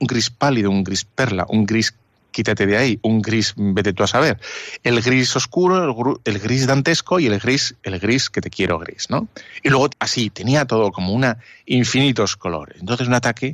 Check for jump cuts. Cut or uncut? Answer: cut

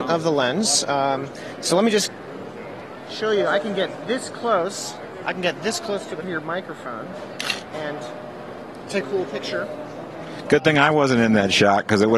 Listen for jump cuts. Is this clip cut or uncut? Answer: cut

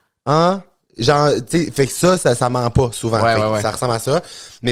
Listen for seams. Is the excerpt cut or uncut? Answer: uncut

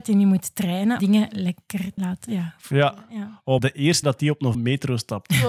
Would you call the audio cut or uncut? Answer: cut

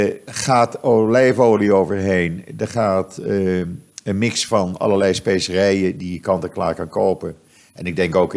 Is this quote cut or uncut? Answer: uncut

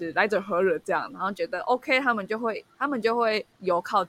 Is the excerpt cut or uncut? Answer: uncut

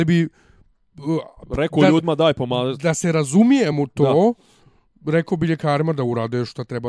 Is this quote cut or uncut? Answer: uncut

